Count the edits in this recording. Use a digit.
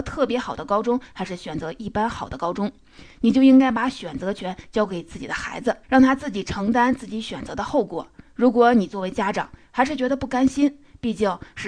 1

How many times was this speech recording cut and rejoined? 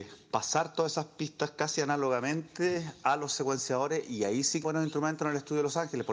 1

